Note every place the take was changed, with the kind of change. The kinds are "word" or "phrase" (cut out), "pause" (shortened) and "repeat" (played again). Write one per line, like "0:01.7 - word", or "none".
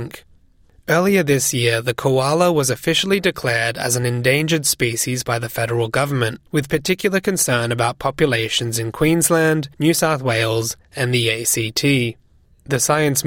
0:06.5 - pause
0:09.7 - pause